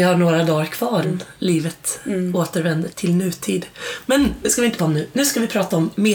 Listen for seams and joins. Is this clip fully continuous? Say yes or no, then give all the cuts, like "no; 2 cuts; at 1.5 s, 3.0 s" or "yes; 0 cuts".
no; 3 cuts; at 1.0 s, 2.9 s, 4.8 s